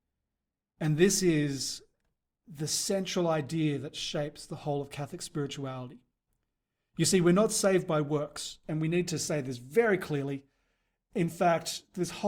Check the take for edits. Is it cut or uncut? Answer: uncut